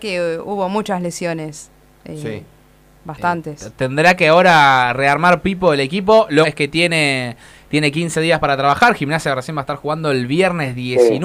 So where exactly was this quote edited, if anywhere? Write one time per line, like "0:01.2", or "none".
0:06.4

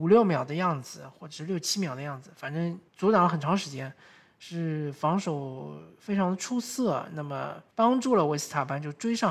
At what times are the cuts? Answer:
0:02.9
0:07.7

